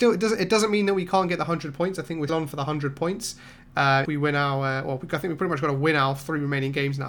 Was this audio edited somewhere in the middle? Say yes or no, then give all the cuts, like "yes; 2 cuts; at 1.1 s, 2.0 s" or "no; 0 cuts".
yes; 2 cuts; at 2.3 s, 4.0 s